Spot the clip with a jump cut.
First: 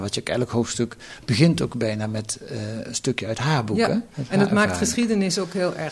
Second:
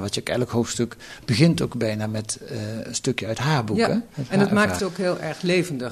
second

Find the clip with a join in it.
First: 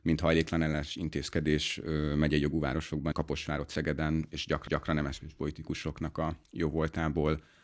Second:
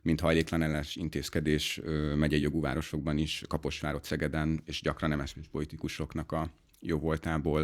first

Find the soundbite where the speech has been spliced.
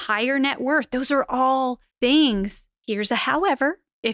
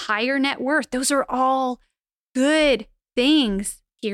first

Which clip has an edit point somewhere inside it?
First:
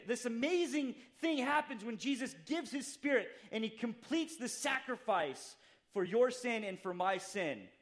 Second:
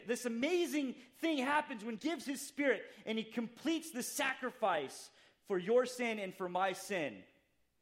second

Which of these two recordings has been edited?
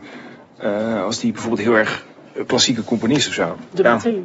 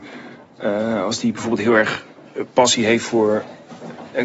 first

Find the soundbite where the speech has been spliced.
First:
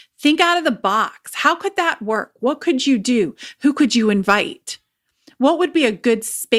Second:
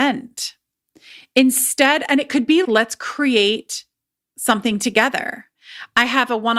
second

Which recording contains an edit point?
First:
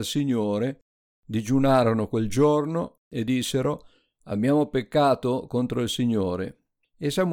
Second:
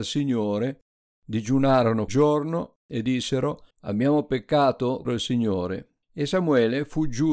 second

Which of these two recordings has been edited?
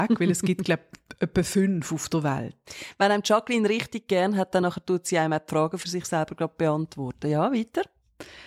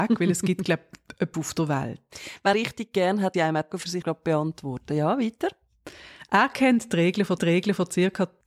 second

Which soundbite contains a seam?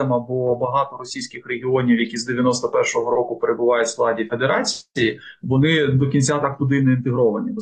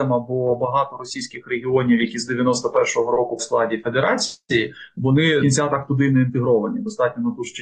second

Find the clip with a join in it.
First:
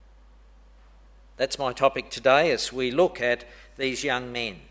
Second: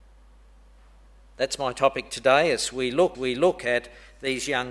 second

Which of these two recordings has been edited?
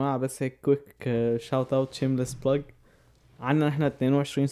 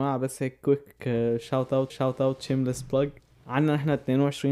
second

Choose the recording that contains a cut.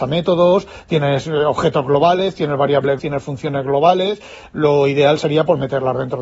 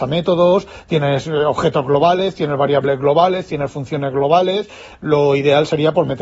first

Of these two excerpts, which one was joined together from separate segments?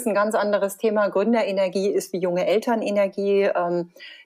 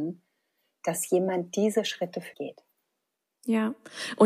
second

